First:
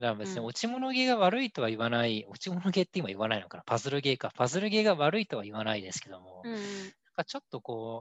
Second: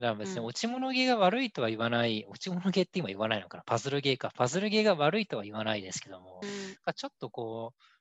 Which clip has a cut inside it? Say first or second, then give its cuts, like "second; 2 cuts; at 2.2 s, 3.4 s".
second; 2 cuts; at 6.4 s, 6.8 s